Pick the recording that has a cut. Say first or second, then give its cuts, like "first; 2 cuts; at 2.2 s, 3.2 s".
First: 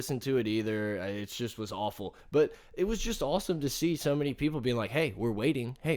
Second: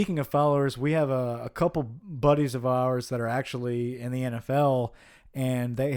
first; 1 cut; at 2.2 s